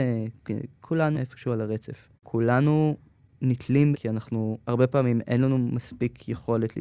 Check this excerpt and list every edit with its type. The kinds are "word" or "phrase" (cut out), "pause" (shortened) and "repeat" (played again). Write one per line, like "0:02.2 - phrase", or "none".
0:01.1 - word
0:02.2 - pause
0:03.9 - word
0:04.6 - pause